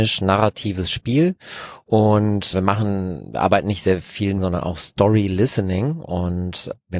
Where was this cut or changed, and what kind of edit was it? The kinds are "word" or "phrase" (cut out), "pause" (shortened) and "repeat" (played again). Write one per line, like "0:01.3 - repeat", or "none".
0:02.5 - word
0:04.4 - phrase

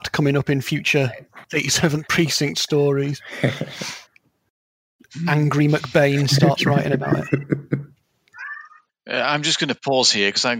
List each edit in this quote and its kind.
0:01.4 - pause
0:04.1 - pause
0:08.9 - pause

